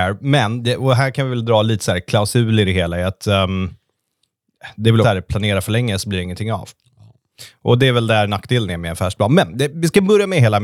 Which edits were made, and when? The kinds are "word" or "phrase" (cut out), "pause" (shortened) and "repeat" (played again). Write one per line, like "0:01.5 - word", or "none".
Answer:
0:05.0 - word
0:09.7 - word